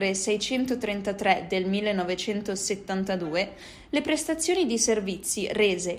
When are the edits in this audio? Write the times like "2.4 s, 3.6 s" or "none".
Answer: none